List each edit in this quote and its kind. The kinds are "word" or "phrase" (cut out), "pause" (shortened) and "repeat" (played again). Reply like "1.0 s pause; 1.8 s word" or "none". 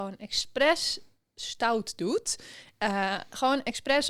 none